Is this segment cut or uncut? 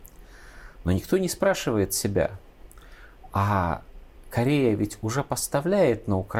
uncut